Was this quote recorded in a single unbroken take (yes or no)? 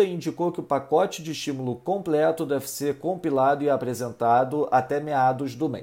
yes